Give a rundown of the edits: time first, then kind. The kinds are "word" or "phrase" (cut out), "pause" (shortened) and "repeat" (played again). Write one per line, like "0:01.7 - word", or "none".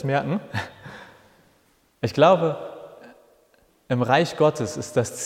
none